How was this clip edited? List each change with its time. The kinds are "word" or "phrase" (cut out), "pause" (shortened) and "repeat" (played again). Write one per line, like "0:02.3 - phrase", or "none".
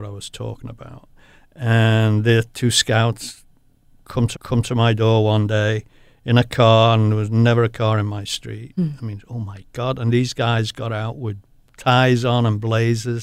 0:04.3 - repeat